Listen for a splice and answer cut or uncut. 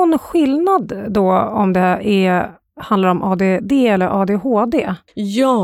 uncut